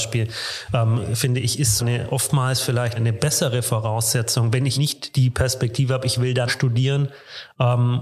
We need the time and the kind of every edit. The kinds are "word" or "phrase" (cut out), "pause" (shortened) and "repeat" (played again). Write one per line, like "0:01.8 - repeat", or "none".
0:01.8 - word
0:03.0 - word
0:04.8 - word
0:06.5 - word